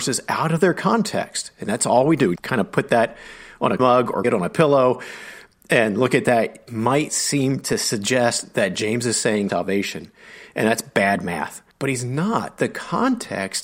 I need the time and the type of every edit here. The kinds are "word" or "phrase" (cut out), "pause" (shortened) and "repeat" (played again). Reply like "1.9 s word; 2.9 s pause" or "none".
2.4 s word; 3.8 s word; 4.2 s word; 6.7 s word; 9.5 s phrase; 11.7 s pause

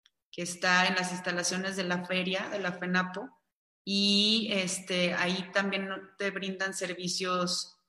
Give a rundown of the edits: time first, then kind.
none

